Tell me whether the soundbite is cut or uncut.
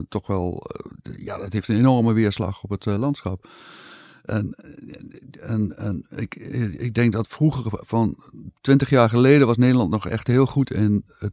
cut